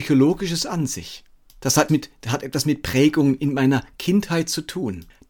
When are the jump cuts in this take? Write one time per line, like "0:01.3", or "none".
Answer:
0:01.9